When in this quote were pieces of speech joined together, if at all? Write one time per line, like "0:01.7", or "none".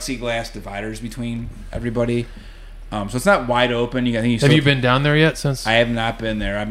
none